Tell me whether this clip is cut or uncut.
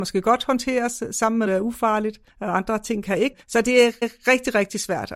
cut